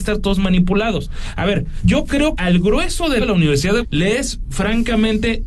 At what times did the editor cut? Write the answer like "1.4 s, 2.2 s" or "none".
1.8 s, 2.4 s, 3.2 s, 3.8 s

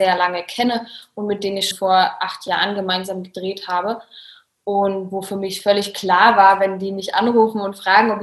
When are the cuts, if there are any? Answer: 1.7 s

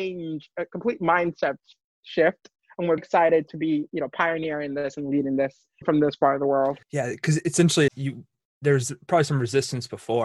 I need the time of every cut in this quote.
3.0 s, 6.8 s, 7.9 s

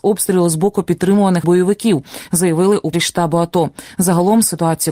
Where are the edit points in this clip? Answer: 1.4 s, 2.9 s

